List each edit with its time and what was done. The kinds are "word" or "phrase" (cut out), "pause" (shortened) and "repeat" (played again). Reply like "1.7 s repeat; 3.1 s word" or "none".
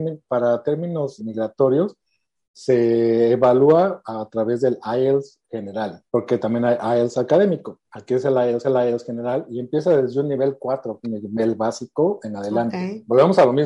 1.2 s word; 6.1 s pause; 8.6 s repeat; 11.0 s phrase